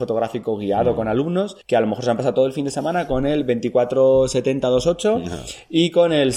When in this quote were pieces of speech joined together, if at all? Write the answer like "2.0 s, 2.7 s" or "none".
1.6 s